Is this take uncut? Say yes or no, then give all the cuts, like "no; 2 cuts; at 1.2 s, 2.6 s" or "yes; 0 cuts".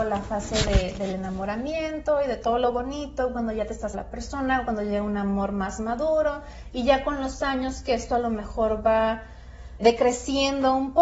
no; 2 cuts; at 3.9 s, 9.8 s